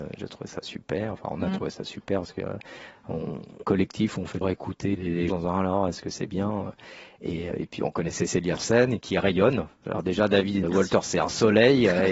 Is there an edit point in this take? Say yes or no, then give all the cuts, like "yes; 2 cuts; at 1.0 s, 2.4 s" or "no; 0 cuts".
yes; 8 cuts; at 3.6 s, 4.4 s, 5.0 s, 5.3 s, 7.5 s, 8.6 s, 9.0 s, 10.6 s